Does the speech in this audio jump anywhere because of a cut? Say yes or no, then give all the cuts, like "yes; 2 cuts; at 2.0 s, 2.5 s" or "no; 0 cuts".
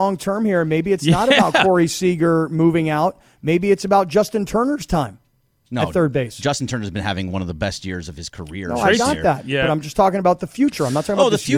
no; 0 cuts